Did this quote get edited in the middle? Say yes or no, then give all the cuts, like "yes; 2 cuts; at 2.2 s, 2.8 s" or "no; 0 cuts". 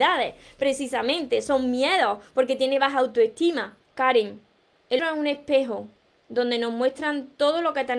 yes; 2 cuts; at 3.8 s, 5.0 s